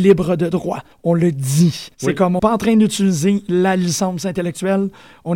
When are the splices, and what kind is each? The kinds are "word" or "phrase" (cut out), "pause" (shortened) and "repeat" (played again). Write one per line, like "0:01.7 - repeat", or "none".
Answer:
0:00.9 - pause
0:01.9 - pause
0:02.4 - word